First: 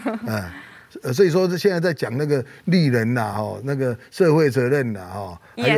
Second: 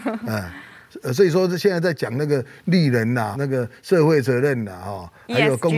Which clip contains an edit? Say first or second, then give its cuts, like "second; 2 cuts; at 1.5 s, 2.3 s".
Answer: second; 1 cut; at 3.3 s